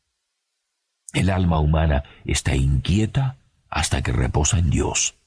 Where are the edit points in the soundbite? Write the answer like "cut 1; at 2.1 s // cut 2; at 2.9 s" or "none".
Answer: none